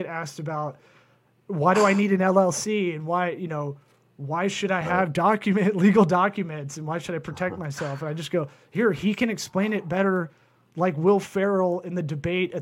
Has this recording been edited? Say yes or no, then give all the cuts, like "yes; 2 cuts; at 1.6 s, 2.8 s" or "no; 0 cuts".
no; 0 cuts